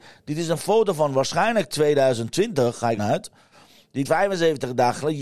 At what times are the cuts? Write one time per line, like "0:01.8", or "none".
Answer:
0:03.0
0:04.0

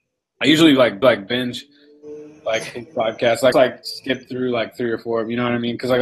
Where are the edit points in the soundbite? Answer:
0:01.0
0:03.5

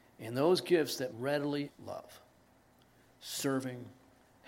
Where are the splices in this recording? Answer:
0:01.1
0:01.7

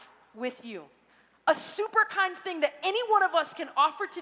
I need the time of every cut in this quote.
none

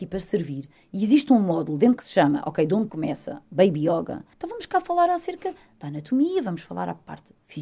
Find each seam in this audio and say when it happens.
0:02.0
0:02.9
0:04.3

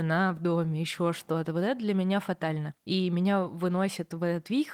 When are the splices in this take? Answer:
0:02.8

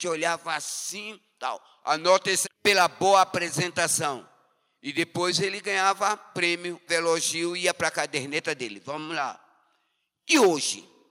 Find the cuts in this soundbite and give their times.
0:02.4
0:06.9

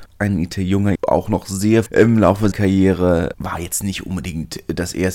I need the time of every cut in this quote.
0:01.0
0:01.9
0:02.5
0:03.3

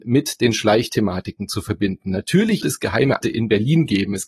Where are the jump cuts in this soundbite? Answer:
0:02.6
0:03.2

